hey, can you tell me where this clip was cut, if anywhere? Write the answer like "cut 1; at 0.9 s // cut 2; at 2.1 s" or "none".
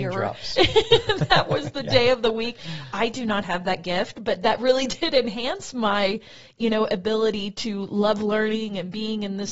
none